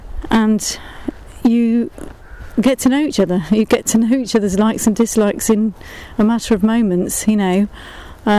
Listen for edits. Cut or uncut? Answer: uncut